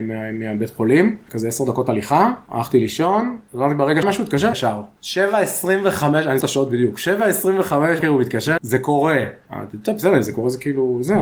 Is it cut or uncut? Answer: cut